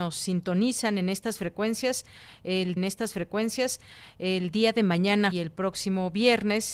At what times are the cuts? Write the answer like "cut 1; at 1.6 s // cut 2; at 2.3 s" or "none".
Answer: cut 1; at 2.8 s // cut 2; at 5.3 s